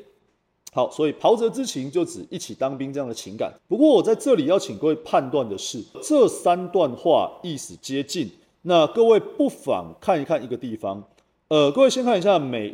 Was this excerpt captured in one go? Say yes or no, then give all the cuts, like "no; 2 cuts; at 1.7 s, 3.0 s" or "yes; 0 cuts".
no; 2 cuts; at 3.6 s, 5.9 s